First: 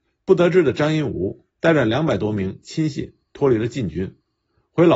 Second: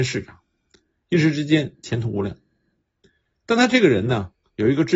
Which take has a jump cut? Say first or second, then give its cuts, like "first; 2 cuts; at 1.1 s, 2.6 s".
first; 1 cut; at 1.5 s